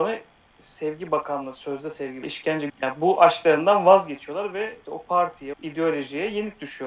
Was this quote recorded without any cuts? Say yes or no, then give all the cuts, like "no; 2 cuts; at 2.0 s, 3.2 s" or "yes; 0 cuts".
no; 4 cuts; at 2.2 s, 2.7 s, 4.8 s, 5.5 s